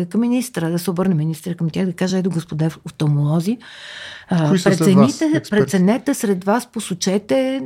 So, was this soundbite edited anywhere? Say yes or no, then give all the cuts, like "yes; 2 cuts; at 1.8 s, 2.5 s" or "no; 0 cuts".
no; 0 cuts